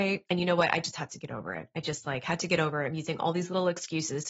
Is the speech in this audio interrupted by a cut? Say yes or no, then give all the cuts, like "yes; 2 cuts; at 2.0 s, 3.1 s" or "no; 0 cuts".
no; 0 cuts